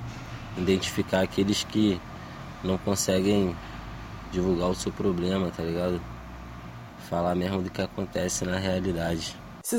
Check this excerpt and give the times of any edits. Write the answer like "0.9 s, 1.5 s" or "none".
none